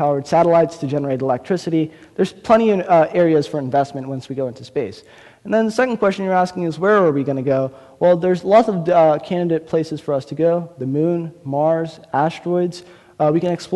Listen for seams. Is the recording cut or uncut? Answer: uncut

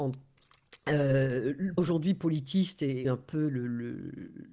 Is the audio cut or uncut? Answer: cut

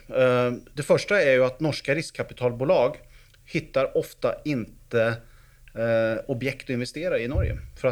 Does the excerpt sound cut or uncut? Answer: uncut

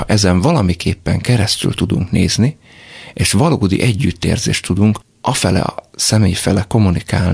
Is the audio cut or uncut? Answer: uncut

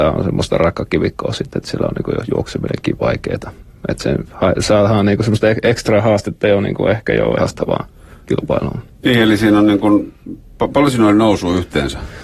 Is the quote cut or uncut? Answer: cut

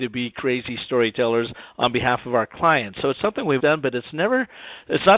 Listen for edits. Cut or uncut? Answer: cut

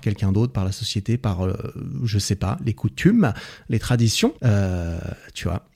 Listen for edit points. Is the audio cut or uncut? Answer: cut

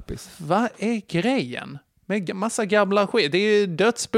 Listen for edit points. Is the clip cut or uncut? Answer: cut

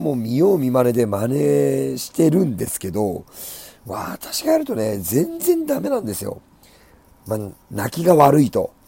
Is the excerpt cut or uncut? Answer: uncut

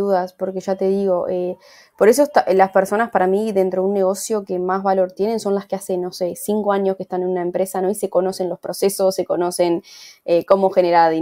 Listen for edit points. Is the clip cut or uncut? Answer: uncut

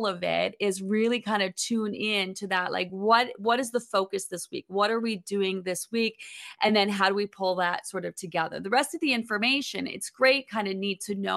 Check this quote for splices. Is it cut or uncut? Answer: uncut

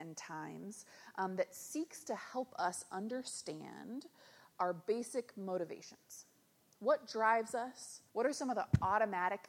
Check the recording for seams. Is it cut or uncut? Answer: cut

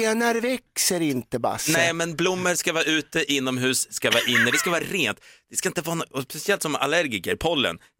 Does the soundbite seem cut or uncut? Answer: uncut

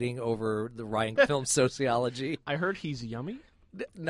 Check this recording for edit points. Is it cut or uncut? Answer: cut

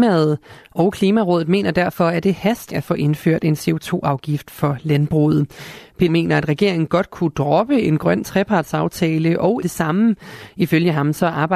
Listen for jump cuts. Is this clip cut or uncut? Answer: cut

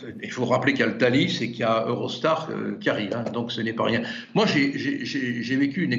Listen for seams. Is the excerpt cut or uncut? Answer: uncut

